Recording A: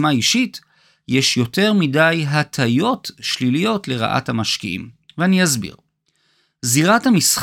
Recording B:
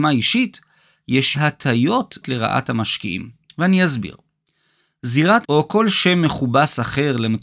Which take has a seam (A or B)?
B